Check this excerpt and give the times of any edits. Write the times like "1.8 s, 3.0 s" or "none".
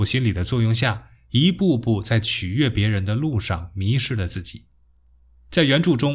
none